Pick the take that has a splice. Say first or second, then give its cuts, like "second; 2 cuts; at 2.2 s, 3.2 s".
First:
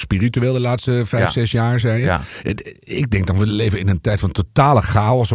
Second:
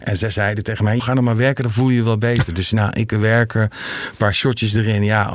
second; 1 cut; at 1.0 s